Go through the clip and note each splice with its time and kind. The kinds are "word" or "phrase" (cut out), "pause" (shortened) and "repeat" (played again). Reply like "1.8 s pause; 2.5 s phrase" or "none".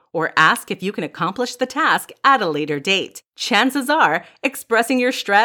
3.3 s pause